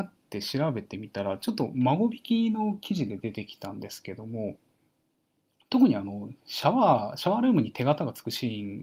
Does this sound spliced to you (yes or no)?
no